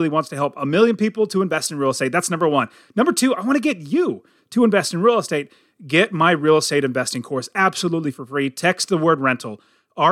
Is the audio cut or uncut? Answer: uncut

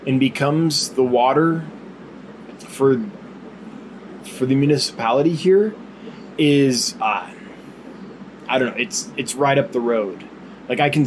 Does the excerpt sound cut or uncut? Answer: uncut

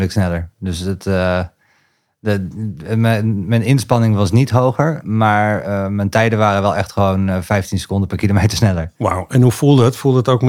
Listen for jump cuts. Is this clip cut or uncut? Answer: cut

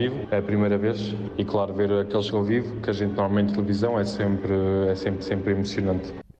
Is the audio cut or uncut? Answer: cut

